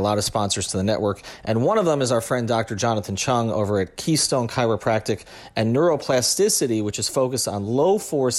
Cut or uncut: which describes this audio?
uncut